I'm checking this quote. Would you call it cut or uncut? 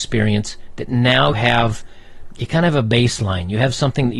cut